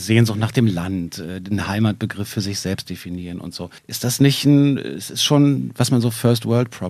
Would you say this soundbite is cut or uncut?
cut